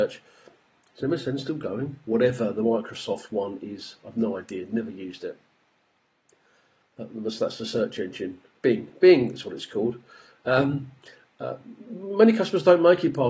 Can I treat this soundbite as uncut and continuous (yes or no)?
yes